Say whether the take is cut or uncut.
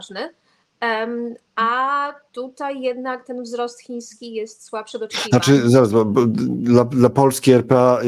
uncut